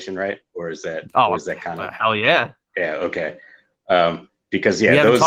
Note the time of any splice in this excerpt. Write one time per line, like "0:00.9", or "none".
none